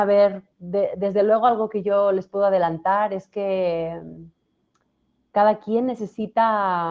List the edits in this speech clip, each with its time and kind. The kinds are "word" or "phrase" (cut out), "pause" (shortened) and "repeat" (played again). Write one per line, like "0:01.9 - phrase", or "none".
none